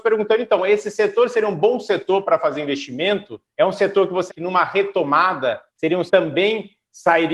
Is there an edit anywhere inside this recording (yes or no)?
yes